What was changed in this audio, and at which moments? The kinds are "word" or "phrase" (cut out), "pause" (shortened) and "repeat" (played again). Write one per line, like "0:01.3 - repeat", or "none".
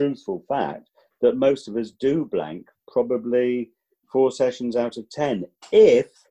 none